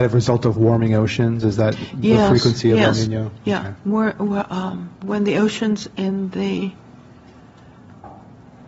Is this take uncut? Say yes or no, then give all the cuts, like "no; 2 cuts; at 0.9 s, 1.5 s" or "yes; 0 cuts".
yes; 0 cuts